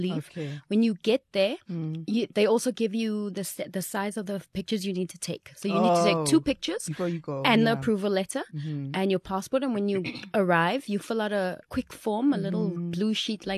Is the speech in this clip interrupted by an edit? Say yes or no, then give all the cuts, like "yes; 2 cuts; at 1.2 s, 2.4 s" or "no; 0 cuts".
yes; 1 cut; at 11.6 s